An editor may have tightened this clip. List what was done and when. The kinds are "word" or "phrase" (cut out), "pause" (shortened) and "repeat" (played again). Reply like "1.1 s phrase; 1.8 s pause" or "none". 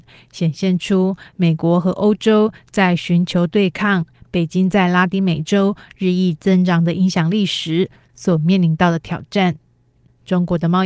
none